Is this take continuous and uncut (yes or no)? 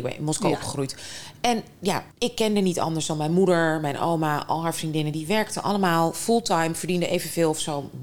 no